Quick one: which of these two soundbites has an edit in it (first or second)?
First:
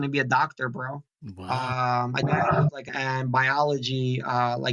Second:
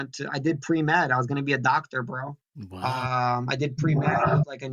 first